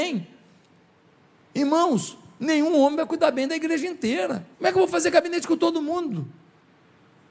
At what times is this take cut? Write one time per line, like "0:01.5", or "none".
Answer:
0:04.5

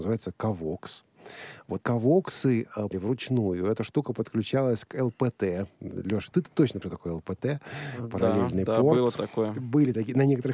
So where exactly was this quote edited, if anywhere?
0:01.8
0:02.9
0:06.3
0:06.8

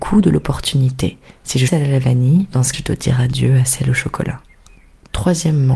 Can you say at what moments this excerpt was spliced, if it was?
0:01.7
0:02.7

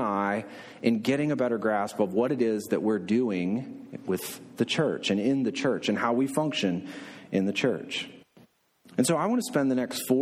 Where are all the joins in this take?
none

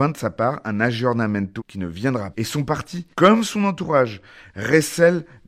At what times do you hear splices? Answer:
0:01.6
0:02.3
0:03.1

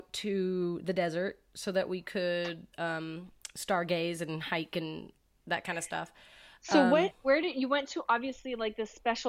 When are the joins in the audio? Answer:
0:02.7

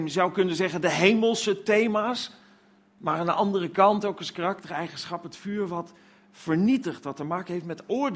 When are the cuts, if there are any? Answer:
none

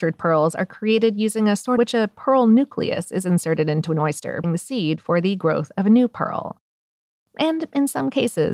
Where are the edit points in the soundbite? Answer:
0:01.8
0:04.4

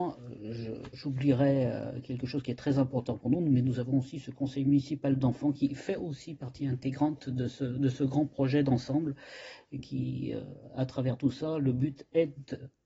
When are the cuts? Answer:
none

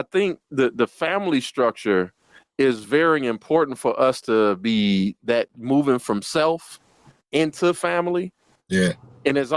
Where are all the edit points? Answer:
none

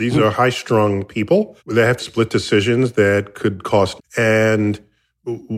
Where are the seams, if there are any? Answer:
0:01.6
0:02.0
0:04.0

